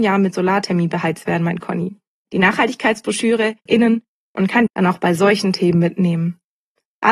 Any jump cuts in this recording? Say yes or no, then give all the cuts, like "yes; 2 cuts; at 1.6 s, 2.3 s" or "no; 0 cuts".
yes; 3 cuts; at 2.1 s, 3.7 s, 4.7 s